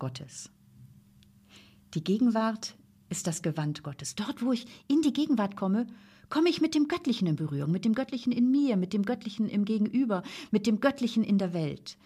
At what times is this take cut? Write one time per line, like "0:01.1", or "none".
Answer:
none